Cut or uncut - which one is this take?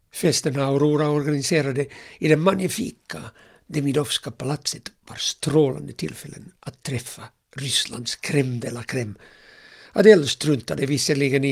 uncut